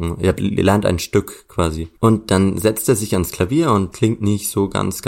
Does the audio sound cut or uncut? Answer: cut